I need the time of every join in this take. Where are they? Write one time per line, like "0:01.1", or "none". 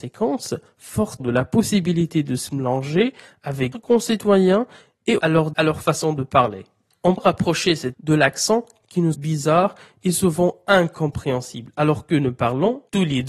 0:01.2
0:03.7
0:05.2
0:05.5
0:07.2
0:07.9
0:08.8
0:09.1